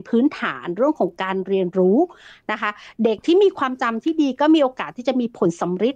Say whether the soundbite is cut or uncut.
uncut